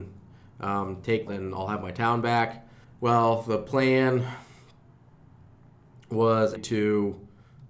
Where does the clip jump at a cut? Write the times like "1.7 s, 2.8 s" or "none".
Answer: 1.3 s, 2.8 s, 6.6 s